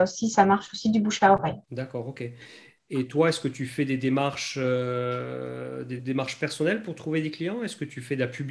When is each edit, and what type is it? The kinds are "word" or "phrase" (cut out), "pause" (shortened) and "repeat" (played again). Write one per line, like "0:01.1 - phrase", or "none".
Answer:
0:01.6 - pause
0:06.0 - word